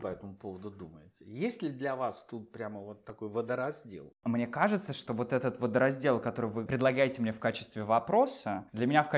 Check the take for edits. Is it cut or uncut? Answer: uncut